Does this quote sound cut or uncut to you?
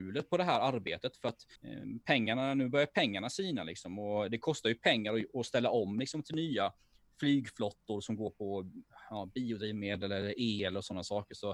cut